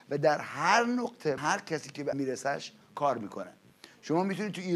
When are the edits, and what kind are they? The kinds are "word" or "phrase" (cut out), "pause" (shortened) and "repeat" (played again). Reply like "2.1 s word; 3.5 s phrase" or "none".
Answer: 1.4 s word; 2.1 s word; 2.8 s word